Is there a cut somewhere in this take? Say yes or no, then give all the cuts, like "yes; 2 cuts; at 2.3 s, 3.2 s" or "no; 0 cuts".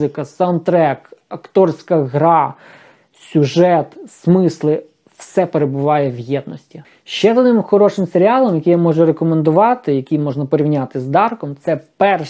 no; 0 cuts